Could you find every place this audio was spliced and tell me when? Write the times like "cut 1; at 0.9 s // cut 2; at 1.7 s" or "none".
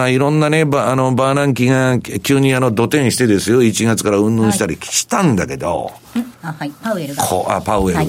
cut 1; at 6.4 s